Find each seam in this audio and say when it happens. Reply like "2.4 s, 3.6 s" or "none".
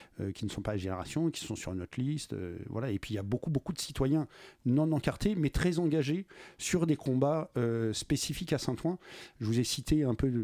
none